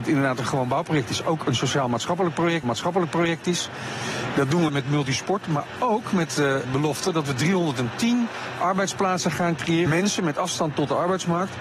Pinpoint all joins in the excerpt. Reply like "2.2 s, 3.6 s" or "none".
2.6 s, 4.7 s, 9.9 s